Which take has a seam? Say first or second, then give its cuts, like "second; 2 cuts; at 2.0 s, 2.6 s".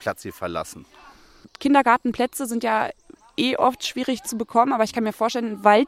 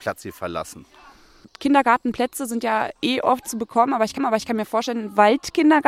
second; 3 cuts; at 3.0 s, 3.4 s, 4.2 s